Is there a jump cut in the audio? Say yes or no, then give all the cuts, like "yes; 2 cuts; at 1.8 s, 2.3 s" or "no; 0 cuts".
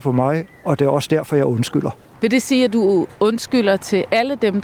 no; 0 cuts